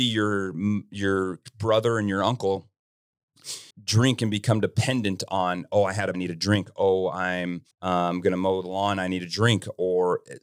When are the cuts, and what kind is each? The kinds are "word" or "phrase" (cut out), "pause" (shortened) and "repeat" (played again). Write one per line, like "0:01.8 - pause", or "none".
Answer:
0:03.7 - pause
0:06.1 - phrase
0:07.7 - pause